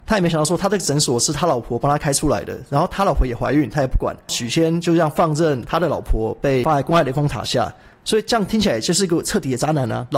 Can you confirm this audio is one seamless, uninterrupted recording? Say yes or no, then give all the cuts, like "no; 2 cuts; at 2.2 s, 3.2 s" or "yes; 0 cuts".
yes; 0 cuts